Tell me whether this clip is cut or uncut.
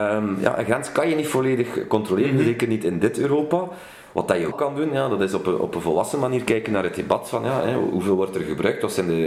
cut